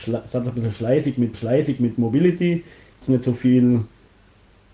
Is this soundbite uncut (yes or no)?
no